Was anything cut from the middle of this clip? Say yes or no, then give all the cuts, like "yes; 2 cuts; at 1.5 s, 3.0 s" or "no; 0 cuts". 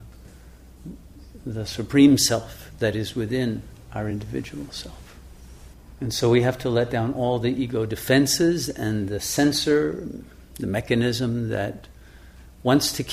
no; 0 cuts